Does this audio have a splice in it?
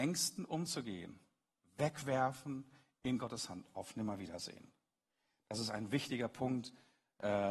no; 0 cuts

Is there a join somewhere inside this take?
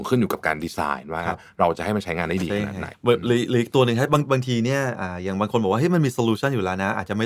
yes; 1 cut; at 2.9 s

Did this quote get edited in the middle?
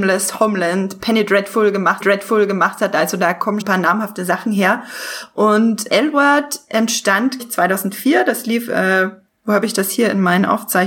yes; 5 cuts; at 2.0 s, 3.6 s, 5.9 s, 7.4 s, 9.3 s

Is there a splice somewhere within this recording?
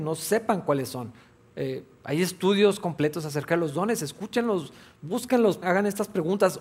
yes; 1 cut; at 5.6 s

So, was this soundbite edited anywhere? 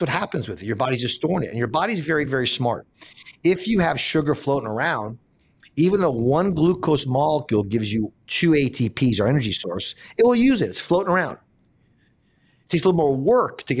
no; 0 cuts

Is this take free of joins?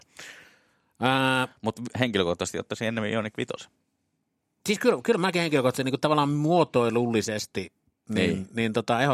yes; 0 cuts

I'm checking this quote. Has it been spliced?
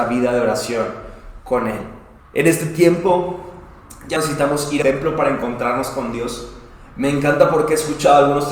yes; 3 cuts; at 2.2 s, 4.2 s, 4.8 s

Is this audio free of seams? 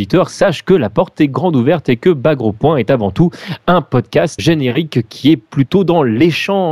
no; 1 cut; at 4.4 s

